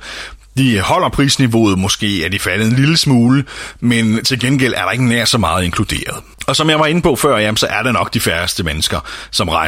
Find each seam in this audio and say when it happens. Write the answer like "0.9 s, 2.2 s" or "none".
6.3 s